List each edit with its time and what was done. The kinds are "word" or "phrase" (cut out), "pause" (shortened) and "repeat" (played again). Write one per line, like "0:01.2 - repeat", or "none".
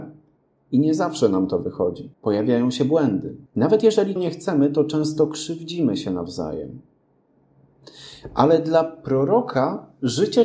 0:02.1 - pause
0:03.5 - pause
0:04.2 - word